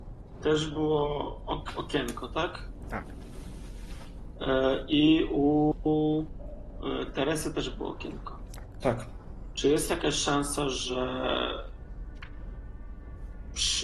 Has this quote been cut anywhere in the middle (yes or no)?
no